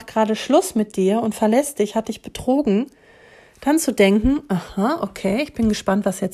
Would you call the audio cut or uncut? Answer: uncut